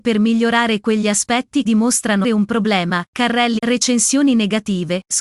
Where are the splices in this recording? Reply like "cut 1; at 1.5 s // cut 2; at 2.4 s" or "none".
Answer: cut 1; at 1.7 s // cut 2; at 2.2 s // cut 3; at 3.6 s